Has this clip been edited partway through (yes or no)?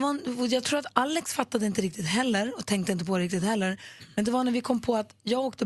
no